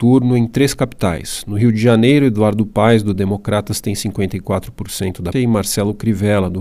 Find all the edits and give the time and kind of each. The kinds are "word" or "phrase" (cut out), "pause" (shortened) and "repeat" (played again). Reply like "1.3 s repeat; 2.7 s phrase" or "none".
5.3 s word